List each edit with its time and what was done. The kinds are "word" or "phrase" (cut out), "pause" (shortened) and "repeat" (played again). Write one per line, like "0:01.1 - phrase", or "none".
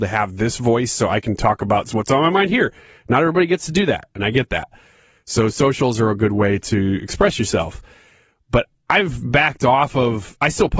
none